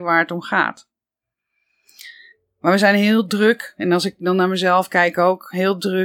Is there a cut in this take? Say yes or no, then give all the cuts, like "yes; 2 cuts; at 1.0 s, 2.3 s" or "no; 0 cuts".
no; 0 cuts